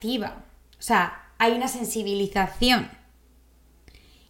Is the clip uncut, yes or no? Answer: yes